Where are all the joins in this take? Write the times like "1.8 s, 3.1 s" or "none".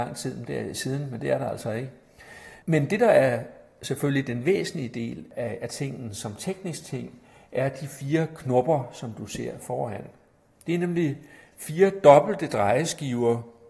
none